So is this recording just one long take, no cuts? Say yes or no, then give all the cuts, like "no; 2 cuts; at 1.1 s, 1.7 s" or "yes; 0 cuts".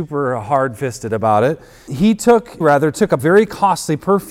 no; 3 cuts; at 1.9 s, 2.6 s, 3.2 s